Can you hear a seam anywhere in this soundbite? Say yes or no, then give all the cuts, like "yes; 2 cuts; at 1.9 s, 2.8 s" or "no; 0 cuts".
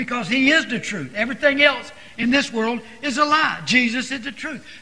no; 0 cuts